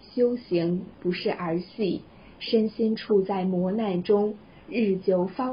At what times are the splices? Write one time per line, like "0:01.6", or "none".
none

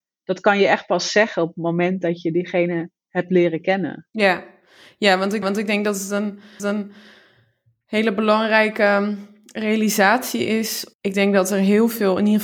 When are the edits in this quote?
0:03.0
0:04.1
0:05.4
0:06.6
0:10.9

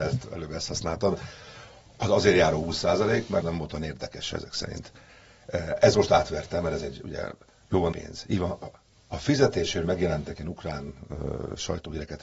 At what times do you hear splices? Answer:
0:03.4
0:07.9
0:09.8

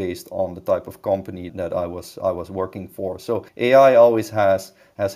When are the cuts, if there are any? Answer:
0:01.5
0:03.5

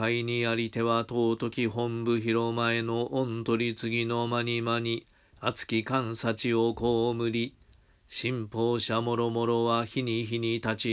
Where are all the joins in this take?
none

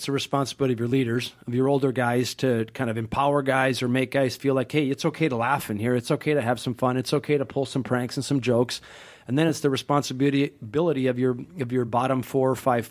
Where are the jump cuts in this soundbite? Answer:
none

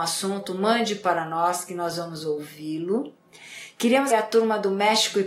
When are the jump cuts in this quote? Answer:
0:04.1

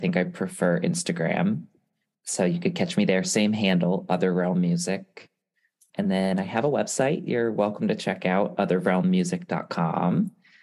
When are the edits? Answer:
none

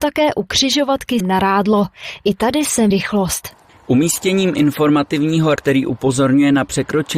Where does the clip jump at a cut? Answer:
0:01.2
0:02.9
0:05.6

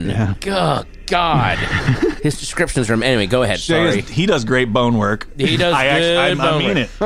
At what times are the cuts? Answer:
none

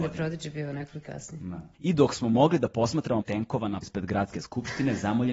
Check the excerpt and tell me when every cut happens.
0:01.0
0:01.7
0:03.2
0:03.8

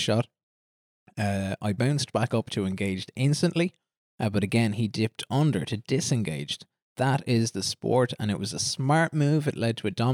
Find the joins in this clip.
none

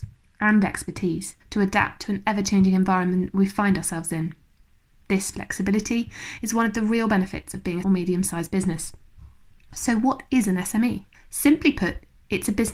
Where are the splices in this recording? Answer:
0:01.4
0:07.8
0:11.1

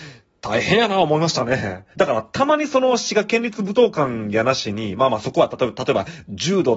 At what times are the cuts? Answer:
0:01.9

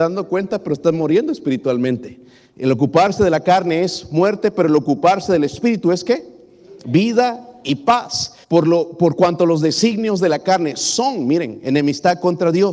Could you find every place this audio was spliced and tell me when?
0:08.4

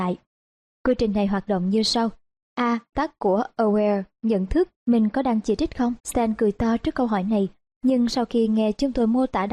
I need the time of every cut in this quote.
0:02.9
0:04.8
0:06.0

